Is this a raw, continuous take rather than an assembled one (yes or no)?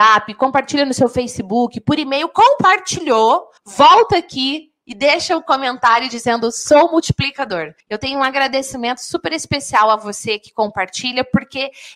no